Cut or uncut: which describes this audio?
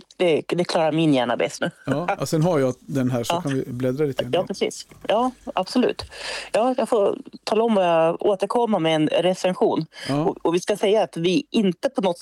cut